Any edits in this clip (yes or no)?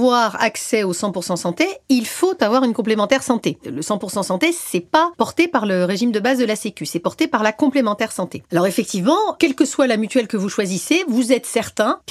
no